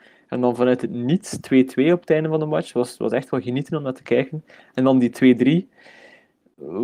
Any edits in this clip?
no; 0 cuts

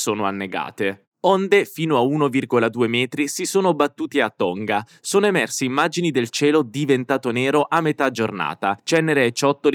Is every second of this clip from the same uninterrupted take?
no; 1 cut; at 8.8 s

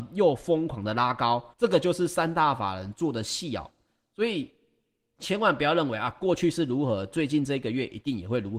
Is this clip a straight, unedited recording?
no; 1 cut; at 1.5 s

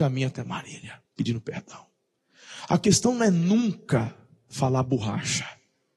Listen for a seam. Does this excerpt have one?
yes; 1 cut; at 1.1 s

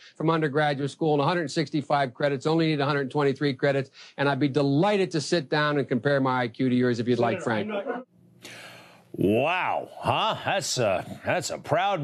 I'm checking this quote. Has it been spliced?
no; 0 cuts

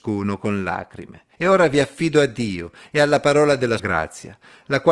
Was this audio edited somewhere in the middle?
yes; 2 cuts; at 1.3 s, 3.8 s

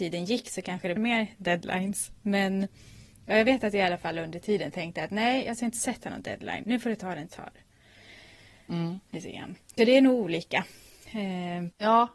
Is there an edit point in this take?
yes; 4 cuts; at 1.0 s, 6.6 s, 7.3 s, 9.6 s

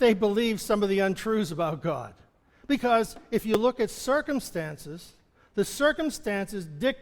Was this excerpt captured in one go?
yes; 0 cuts

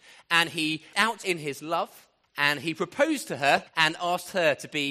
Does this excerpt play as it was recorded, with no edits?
no; 4 cuts; at 0.9 s, 1.2 s, 2.2 s, 3.7 s

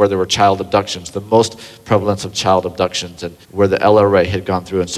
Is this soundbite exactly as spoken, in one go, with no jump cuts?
no; 1 cut; at 3.4 s

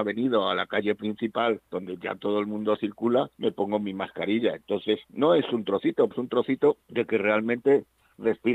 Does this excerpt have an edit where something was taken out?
yes; 5 cuts; at 1.6 s, 3.3 s, 5.0 s, 6.1 s, 6.8 s

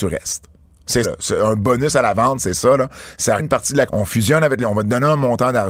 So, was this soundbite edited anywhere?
yes; 4 cuts; at 1.0 s, 3.4 s, 3.9 s, 4.6 s

